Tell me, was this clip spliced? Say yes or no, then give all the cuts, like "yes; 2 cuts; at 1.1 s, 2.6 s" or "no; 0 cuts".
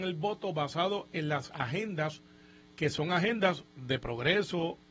yes; 1 cut; at 3.7 s